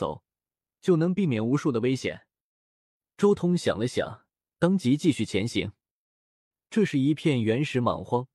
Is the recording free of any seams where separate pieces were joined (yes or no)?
yes